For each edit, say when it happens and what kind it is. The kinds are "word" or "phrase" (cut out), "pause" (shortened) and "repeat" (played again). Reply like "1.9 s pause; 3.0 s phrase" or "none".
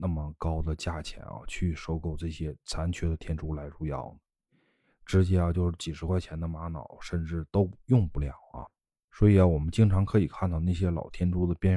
none